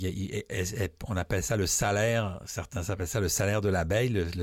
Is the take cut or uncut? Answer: uncut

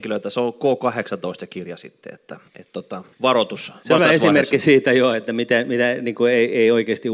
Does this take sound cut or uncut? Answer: cut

